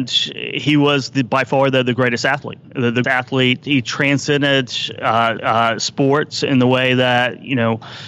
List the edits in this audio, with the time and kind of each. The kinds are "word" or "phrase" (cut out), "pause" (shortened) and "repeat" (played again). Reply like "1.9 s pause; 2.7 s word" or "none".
2.6 s pause; 3.0 s phrase; 5.4 s repeat